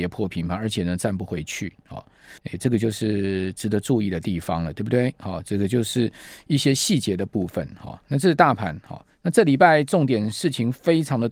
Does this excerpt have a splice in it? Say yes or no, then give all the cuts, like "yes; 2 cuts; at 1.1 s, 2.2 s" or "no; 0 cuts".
yes; 1 cut; at 2.4 s